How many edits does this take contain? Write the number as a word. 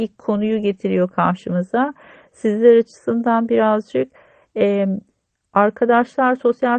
zero